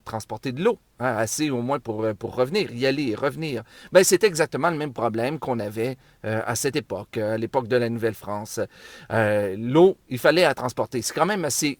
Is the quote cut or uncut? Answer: uncut